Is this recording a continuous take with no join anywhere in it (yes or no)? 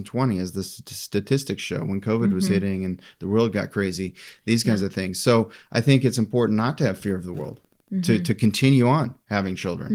yes